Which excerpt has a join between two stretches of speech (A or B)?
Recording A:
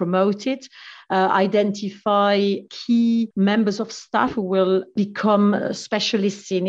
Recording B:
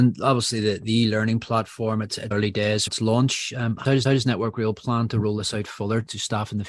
B